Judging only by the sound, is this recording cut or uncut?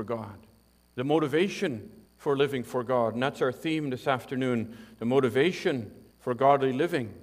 cut